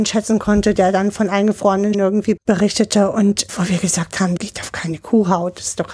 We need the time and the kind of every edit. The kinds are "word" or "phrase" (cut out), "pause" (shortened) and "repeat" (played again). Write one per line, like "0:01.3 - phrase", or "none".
0:01.9 - word
0:02.4 - word
0:03.5 - word
0:04.4 - word